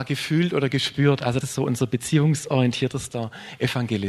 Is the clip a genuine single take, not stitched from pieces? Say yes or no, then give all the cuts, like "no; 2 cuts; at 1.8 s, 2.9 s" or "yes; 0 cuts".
no; 1 cut; at 1.4 s